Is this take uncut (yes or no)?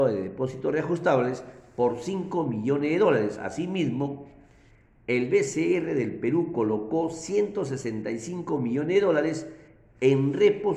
yes